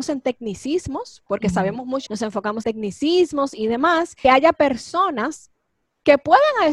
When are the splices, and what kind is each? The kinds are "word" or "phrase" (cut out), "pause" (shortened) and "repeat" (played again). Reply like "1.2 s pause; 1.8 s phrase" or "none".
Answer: 2.1 s phrase; 2.6 s word; 4.2 s phrase